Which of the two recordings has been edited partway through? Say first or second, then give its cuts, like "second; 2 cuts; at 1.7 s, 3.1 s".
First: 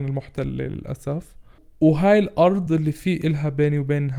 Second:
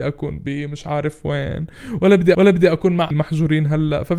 second; 2 cuts; at 2.3 s, 3.1 s